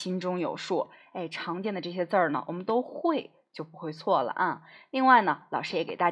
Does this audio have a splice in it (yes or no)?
no